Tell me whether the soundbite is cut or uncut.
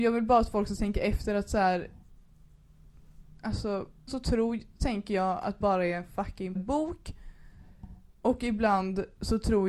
cut